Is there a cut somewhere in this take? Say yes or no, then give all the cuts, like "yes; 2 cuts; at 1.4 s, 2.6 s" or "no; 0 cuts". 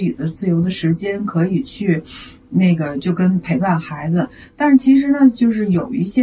no; 0 cuts